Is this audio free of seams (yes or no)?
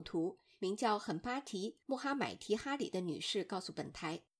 yes